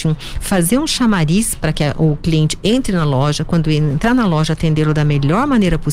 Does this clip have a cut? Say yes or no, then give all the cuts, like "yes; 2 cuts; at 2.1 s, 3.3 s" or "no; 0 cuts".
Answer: no; 0 cuts